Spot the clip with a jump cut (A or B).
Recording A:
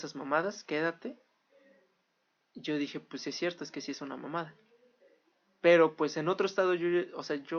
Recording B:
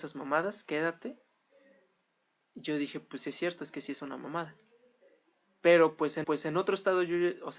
B